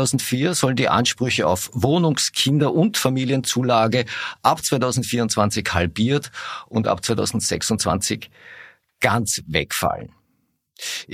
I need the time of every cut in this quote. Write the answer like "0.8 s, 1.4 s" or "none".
none